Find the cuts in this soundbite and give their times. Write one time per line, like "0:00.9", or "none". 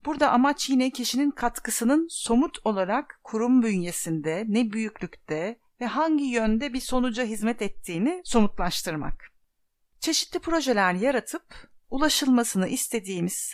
none